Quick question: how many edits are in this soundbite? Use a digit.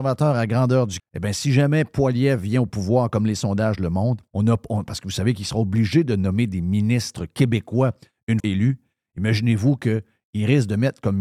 3